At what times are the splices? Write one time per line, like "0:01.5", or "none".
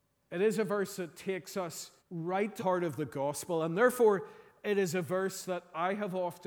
0:02.0
0:02.6